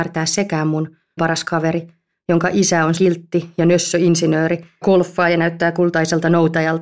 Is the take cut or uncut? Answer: cut